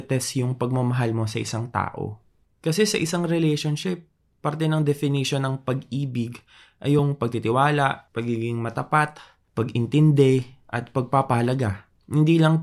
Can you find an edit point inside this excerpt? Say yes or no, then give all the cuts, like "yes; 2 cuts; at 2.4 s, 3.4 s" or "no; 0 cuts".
no; 0 cuts